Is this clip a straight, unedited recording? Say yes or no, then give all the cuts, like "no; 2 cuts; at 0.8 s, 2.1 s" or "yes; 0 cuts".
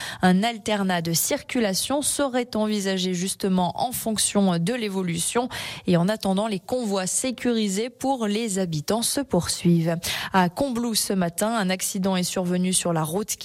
yes; 0 cuts